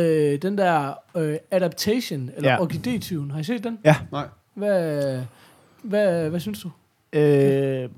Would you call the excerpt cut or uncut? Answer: uncut